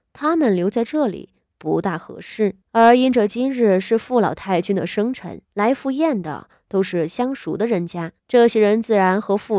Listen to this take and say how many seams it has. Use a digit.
3